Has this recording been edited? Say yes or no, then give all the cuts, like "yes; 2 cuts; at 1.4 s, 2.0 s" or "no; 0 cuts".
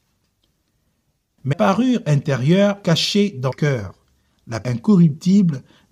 yes; 4 cuts; at 1.5 s, 2.8 s, 3.5 s, 4.6 s